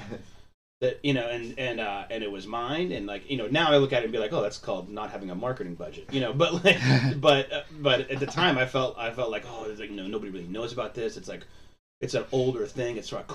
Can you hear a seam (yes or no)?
no